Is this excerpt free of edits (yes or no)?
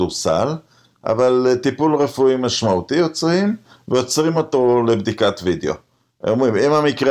yes